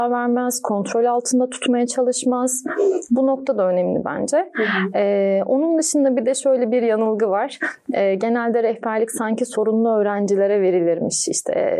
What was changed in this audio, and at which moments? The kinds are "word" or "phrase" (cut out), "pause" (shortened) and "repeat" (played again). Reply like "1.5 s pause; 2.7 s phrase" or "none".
none